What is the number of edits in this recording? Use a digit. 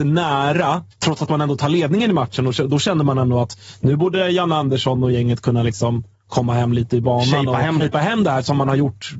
2